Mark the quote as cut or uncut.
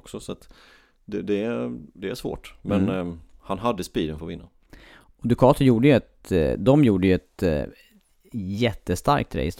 uncut